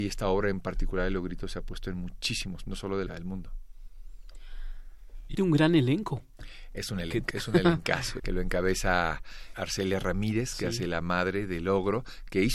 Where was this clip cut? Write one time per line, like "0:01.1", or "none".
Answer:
0:02.7
0:03.1
0:05.3
0:07.3
0:08.2
0:09.5